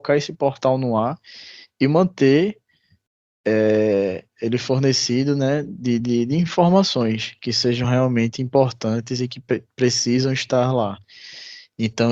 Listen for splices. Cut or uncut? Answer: uncut